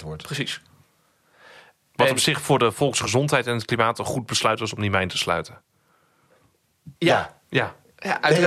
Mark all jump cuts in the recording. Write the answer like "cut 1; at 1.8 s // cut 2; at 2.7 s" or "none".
cut 1; at 7.0 s